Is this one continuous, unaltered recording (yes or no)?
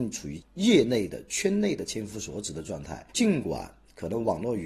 no